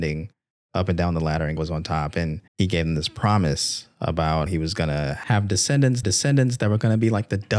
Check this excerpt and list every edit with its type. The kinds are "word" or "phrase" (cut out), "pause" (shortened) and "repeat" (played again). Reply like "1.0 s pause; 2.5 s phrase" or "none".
1.6 s word; 2.5 s pause; 4.5 s word; 6.0 s repeat